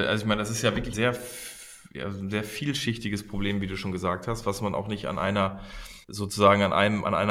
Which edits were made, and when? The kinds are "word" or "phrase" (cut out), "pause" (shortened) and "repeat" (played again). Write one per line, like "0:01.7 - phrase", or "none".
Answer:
0:00.9 - word
0:06.0 - pause